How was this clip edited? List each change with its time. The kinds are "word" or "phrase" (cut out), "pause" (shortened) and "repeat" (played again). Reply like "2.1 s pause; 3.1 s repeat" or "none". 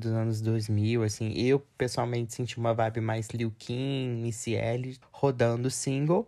5.0 s word